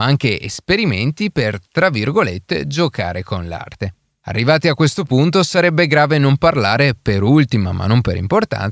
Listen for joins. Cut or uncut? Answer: uncut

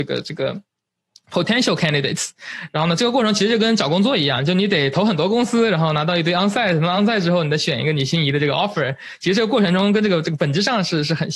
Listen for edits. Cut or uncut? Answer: uncut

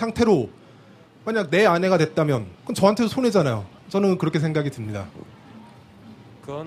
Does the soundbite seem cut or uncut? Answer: cut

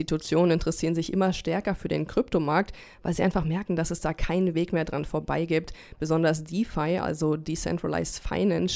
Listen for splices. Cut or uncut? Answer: uncut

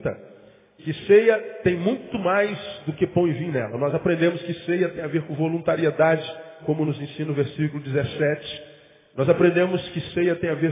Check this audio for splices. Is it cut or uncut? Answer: uncut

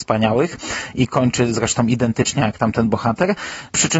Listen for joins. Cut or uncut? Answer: uncut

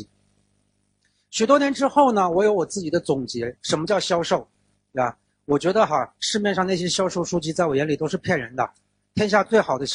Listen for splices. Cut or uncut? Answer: uncut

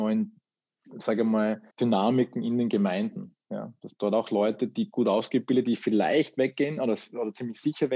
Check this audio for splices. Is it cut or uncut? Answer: cut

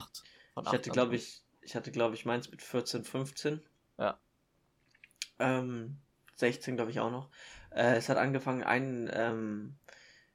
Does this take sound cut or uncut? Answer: uncut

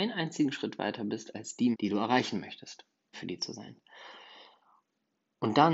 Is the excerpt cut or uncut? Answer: cut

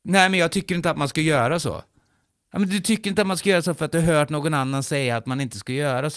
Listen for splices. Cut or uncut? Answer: uncut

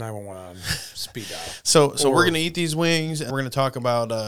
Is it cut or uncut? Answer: cut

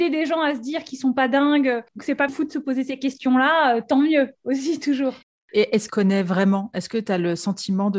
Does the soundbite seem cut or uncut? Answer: cut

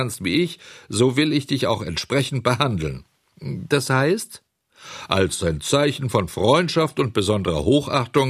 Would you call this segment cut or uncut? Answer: uncut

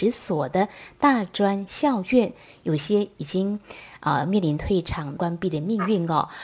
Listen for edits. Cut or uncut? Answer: uncut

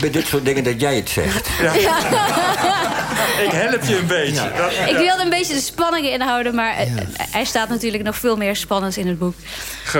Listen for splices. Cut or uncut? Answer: uncut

